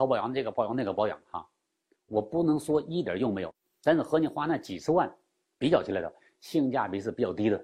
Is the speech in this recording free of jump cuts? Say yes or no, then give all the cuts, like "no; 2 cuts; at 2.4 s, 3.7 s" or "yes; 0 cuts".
yes; 0 cuts